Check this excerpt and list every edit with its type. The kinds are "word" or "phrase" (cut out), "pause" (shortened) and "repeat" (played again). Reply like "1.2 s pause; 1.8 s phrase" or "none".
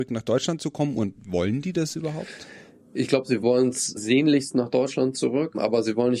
none